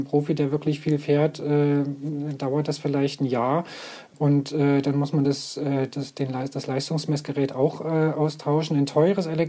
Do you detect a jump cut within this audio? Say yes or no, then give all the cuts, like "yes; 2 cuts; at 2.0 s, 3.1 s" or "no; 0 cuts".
no; 0 cuts